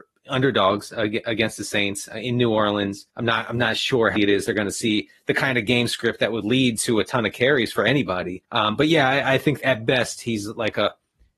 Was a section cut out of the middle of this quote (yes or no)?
yes